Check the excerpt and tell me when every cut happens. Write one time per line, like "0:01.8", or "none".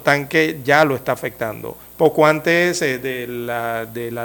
0:01.8